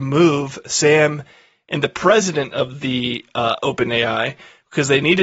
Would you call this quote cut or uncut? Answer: uncut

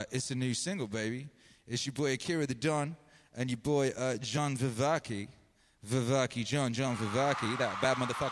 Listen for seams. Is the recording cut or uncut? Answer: uncut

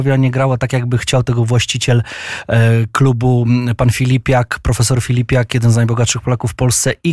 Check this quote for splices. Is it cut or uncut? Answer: uncut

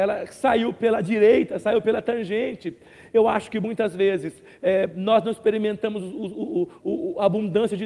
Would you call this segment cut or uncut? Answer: uncut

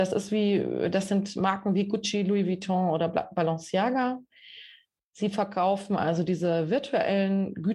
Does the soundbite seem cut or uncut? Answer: uncut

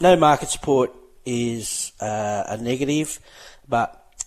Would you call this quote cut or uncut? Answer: uncut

